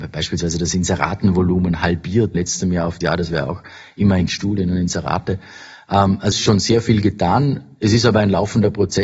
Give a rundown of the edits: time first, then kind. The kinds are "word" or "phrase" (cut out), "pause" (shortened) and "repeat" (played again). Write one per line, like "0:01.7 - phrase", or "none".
0:02.3 - word
0:03.0 - word
0:04.3 - phrase
0:06.3 - phrase